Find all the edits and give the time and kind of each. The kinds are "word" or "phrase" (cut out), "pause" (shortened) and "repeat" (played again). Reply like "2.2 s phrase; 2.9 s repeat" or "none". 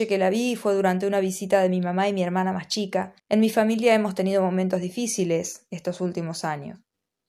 3.2 s pause